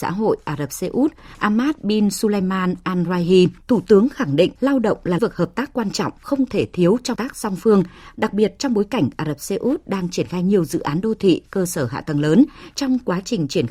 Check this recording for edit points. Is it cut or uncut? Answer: cut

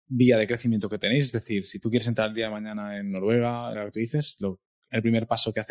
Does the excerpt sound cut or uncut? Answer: cut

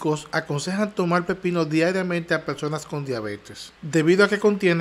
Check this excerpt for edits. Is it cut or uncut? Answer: uncut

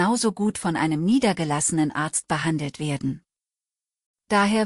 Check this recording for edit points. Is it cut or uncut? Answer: uncut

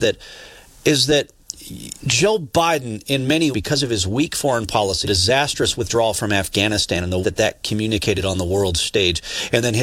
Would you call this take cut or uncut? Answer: cut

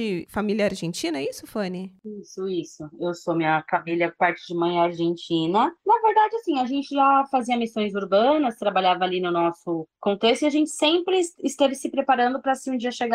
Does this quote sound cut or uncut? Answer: cut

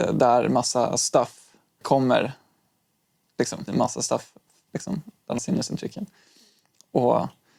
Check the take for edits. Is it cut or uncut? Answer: cut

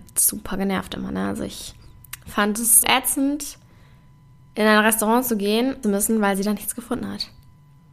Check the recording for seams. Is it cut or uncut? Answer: cut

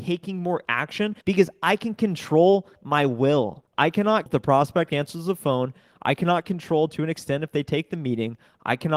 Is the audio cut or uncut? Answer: cut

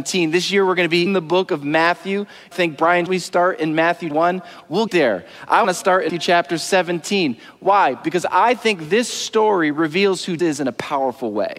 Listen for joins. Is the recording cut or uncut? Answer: cut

